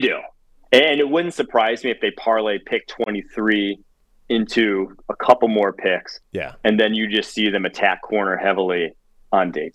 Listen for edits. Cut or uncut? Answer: uncut